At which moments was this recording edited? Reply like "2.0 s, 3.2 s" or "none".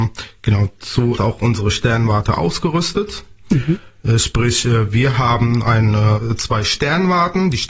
1.2 s